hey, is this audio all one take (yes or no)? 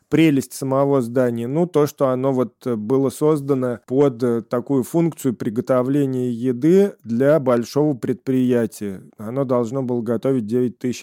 no